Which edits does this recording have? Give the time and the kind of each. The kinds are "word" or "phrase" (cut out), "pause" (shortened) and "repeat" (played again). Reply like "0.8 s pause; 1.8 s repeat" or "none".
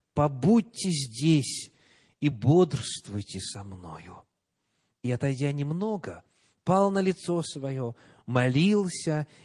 none